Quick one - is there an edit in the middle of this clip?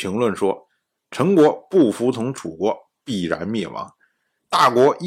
no; 0 cuts

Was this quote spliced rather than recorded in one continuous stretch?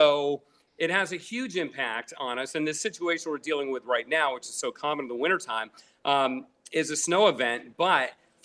no; 0 cuts

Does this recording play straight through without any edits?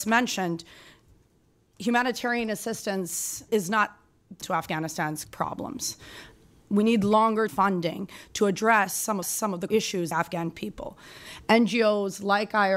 no; 7 cuts; at 3.5 s, 4.4 s, 5.2 s, 7.5 s, 9.2 s, 9.7 s, 10.1 s

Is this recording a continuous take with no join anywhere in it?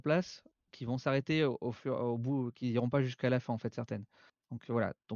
yes; 0 cuts

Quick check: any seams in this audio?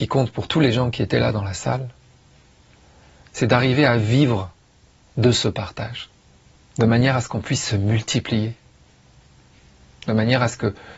no; 0 cuts

